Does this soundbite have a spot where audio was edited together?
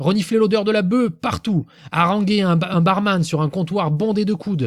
no; 0 cuts

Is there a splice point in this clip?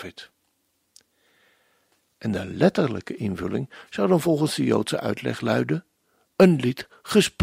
no; 0 cuts

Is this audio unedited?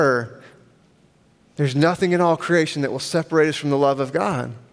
yes; 0 cuts

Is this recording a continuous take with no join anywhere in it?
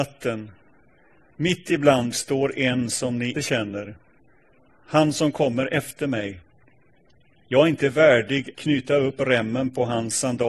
no; 3 cuts; at 2.1 s, 3.3 s, 8.5 s

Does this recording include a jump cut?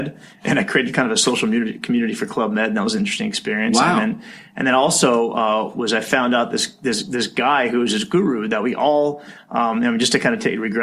no; 0 cuts

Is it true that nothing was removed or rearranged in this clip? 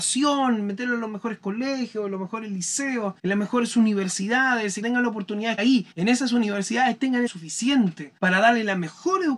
no; 6 cuts; at 3.2 s, 4.8 s, 5.6 s, 5.9 s, 7.3 s, 8.2 s

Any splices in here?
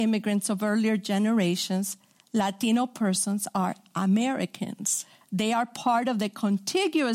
yes; 2 cuts; at 2.2 s, 5.2 s

